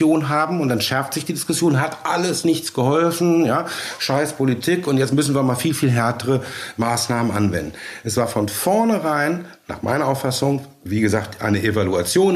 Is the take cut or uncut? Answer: uncut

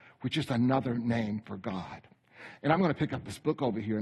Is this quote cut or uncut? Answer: uncut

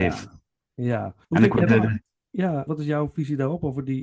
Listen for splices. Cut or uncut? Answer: cut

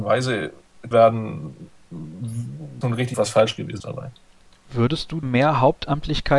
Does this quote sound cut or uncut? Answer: cut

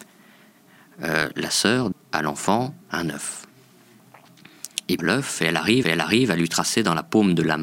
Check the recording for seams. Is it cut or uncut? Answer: cut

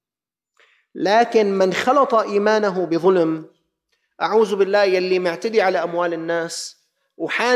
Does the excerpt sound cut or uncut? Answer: uncut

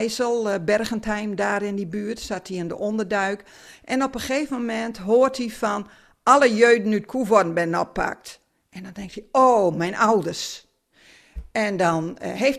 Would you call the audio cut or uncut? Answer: uncut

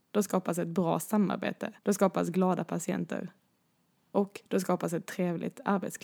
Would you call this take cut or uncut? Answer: cut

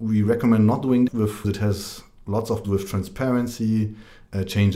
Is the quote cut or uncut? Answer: cut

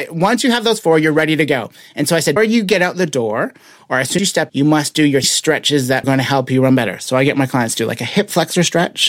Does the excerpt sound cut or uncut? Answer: cut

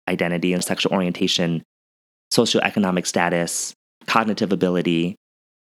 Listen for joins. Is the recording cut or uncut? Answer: uncut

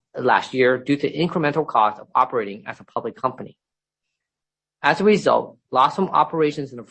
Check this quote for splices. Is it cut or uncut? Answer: uncut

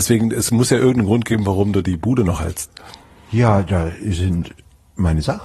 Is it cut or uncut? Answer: uncut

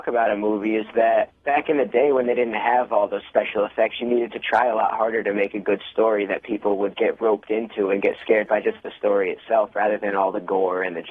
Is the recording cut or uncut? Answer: cut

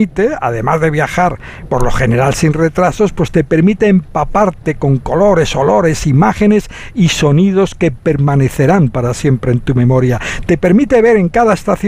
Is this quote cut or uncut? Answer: uncut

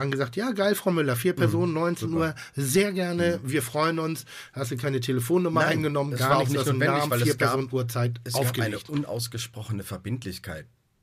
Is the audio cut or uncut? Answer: uncut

